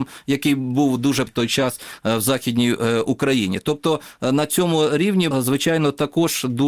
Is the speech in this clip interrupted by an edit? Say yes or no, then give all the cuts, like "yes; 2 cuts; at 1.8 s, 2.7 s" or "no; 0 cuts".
yes; 2 cuts; at 1.3 s, 5.3 s